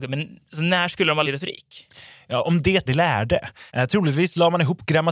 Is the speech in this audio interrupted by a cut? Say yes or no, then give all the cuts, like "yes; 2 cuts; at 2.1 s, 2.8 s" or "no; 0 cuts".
yes; 3 cuts; at 1.2 s, 2.9 s, 3.7 s